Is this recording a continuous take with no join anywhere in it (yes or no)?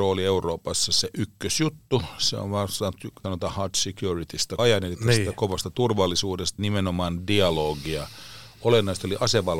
no